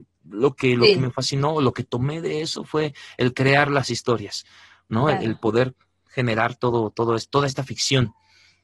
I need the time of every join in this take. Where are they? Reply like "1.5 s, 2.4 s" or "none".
none